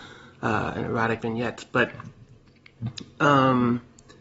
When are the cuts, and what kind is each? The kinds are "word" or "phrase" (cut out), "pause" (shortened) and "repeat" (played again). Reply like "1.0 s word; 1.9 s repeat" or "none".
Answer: 1.2 s word